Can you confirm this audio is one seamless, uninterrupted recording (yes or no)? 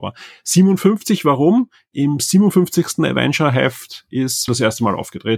no